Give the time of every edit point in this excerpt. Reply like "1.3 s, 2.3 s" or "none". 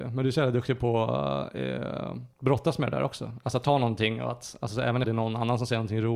2.3 s, 5.0 s

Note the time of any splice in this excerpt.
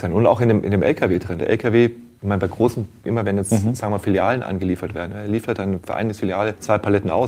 1.4 s

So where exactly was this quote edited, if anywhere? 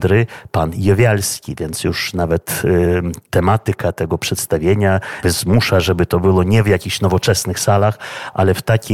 5.2 s

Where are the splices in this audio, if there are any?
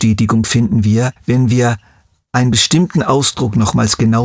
1.2 s

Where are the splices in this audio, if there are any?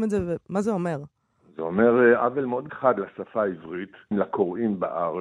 2.7 s, 4.1 s

